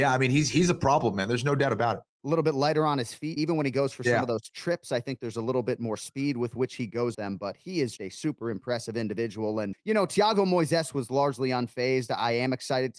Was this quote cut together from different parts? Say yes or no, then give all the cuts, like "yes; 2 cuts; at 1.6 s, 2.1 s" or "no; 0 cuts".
yes; 4 cuts; at 3.4 s, 7.1 s, 8.0 s, 9.7 s